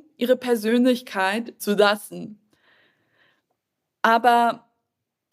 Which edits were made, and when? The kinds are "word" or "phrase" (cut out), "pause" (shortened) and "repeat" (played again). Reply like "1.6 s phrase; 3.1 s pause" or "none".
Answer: 1.6 s word